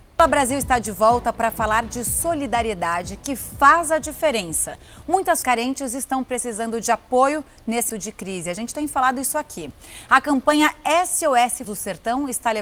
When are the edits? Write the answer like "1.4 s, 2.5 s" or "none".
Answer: 5.4 s, 7.9 s, 11.6 s